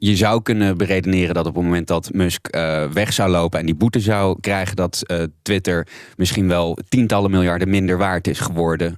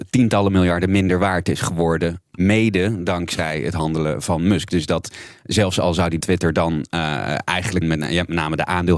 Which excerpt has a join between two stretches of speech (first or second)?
second